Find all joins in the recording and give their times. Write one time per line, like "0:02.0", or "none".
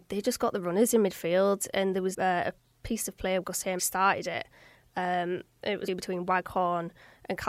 0:02.1
0:03.4
0:03.8
0:05.9